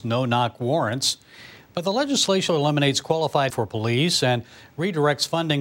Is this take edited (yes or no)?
yes